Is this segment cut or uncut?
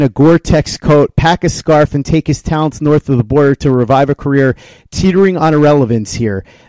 uncut